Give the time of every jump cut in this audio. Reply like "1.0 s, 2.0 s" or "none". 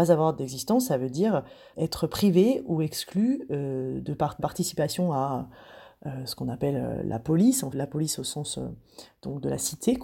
1.7 s, 4.4 s, 7.7 s